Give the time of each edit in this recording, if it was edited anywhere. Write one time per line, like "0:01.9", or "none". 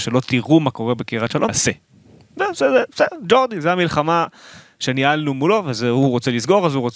0:01.5